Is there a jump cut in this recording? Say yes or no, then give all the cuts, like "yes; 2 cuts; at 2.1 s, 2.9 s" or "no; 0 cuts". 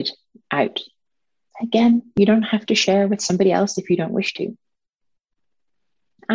no; 0 cuts